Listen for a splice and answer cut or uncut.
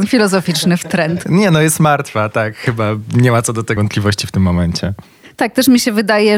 cut